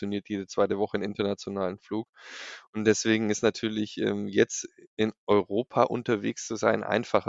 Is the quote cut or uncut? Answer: uncut